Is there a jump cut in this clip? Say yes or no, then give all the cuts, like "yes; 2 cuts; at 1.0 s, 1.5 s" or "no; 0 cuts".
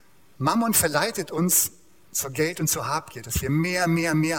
no; 0 cuts